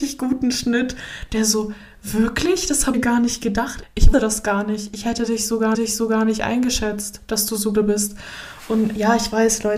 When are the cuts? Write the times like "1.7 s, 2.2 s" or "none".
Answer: 2.9 s, 4.1 s, 5.7 s, 7.7 s